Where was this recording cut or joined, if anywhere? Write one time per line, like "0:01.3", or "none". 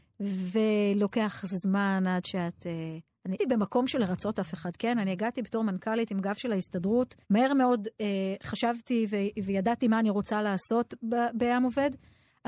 0:03.4
0:07.2